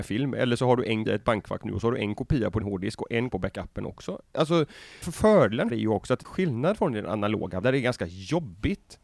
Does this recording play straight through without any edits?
no; 7 cuts; at 1.1 s, 2.6 s, 3.3 s, 5.0 s, 5.7 s, 6.2 s, 7.6 s

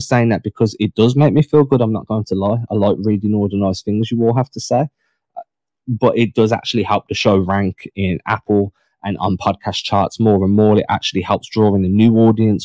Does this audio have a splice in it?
no; 0 cuts

